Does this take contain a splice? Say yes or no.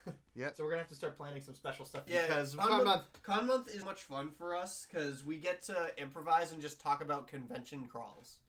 yes